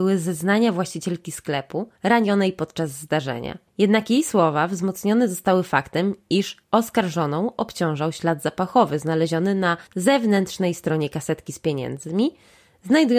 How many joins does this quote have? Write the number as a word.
four